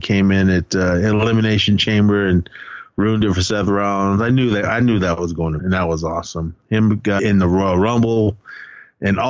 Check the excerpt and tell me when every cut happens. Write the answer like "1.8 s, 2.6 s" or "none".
5.6 s, 7.2 s